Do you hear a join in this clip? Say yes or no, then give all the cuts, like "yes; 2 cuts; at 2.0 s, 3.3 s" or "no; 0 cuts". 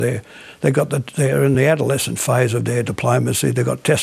no; 0 cuts